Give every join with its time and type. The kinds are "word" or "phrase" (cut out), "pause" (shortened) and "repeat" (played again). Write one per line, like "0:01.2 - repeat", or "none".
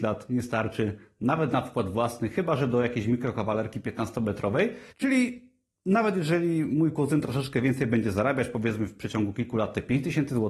0:04.9 - pause